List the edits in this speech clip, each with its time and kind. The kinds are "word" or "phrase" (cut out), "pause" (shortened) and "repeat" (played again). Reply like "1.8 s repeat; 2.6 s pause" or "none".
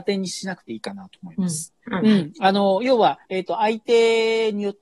1.8 s pause; 3.2 s pause